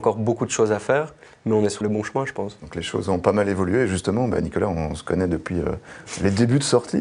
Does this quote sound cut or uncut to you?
cut